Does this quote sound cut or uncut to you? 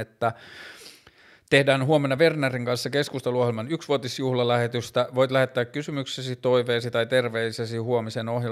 uncut